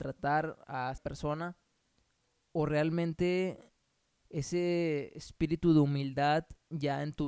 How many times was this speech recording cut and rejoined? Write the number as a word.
two